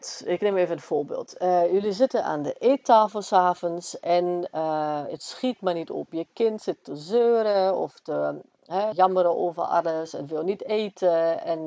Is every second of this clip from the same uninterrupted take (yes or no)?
no